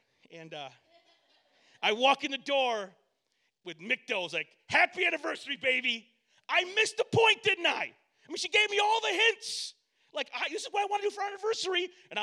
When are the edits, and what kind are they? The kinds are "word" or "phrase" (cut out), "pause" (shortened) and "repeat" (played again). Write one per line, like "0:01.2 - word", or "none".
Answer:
none